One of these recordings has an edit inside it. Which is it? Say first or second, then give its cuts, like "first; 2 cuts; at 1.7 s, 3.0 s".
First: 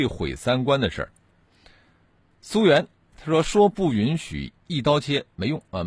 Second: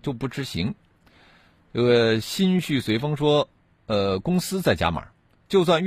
second; 1 cut; at 3.6 s